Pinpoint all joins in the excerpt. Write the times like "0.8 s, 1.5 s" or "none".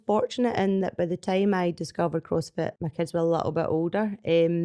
2.8 s